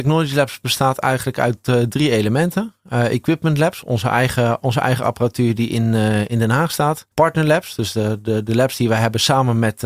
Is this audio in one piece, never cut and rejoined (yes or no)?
no